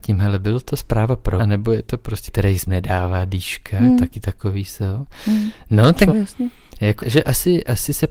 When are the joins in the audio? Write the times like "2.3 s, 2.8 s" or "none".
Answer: 1.4 s, 2.3 s, 2.7 s, 6.1 s, 7.0 s